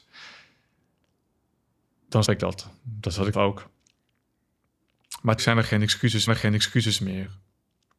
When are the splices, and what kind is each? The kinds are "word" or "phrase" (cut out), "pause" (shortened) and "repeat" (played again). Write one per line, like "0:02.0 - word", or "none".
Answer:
0:02.2 - word
0:03.3 - word
0:05.4 - word
0:06.3 - repeat